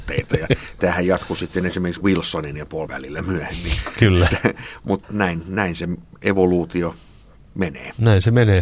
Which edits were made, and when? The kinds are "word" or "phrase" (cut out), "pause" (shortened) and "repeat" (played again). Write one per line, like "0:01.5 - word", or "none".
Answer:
0:02.0 - word
0:02.9 - word
0:05.0 - word